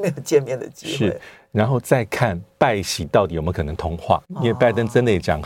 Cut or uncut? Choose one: cut